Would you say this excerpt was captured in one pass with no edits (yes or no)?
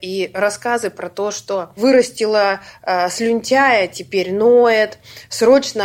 yes